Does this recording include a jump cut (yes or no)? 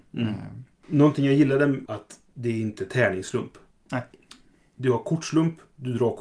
yes